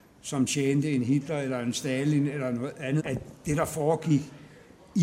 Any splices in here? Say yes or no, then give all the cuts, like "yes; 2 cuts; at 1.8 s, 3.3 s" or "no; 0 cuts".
yes; 1 cut; at 3.0 s